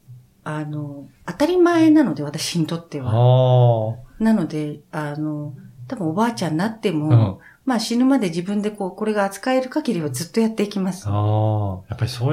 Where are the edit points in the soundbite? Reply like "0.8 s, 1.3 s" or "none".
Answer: 1.2 s